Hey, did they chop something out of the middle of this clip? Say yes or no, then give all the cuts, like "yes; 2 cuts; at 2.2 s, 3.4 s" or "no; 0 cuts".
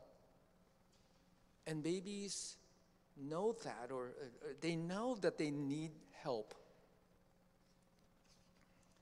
no; 0 cuts